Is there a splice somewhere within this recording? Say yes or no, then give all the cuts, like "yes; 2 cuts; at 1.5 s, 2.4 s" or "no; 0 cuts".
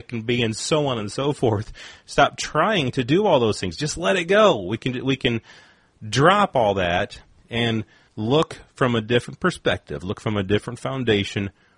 no; 0 cuts